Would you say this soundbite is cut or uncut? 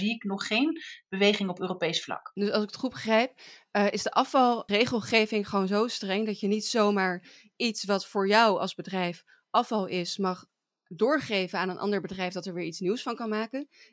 uncut